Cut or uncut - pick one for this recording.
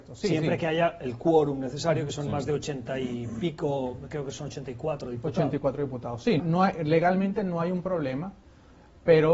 cut